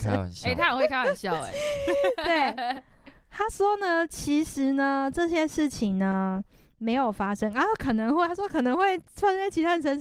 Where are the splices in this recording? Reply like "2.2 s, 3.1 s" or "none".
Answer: none